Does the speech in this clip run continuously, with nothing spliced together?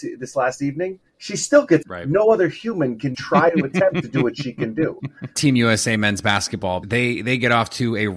no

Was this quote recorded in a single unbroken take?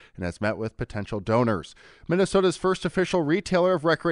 yes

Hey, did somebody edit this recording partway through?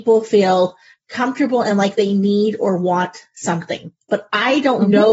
no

